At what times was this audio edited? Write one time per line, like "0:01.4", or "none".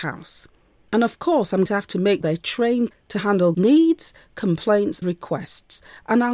0:01.7
0:02.2
0:03.5
0:05.0